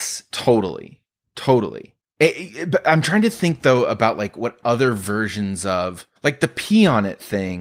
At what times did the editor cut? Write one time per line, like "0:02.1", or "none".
0:02.0
0:06.2